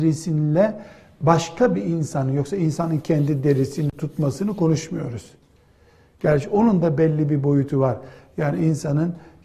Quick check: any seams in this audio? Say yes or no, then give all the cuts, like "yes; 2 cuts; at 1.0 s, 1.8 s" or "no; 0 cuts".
no; 0 cuts